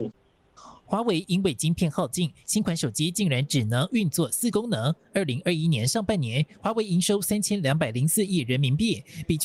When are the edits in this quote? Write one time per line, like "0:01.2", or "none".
0:04.5